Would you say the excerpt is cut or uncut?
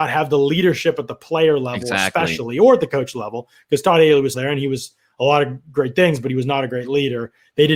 cut